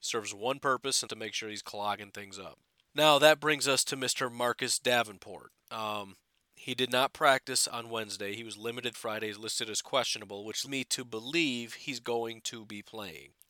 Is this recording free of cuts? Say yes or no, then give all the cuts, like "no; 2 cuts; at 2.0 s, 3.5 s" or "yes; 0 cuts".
no; 3 cuts; at 1.1 s, 8.9 s, 10.7 s